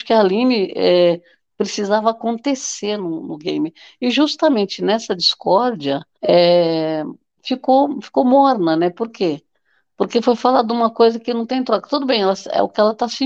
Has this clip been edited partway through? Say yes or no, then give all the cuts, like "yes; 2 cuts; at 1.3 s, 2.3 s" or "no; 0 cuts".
yes; 1 cut; at 6.1 s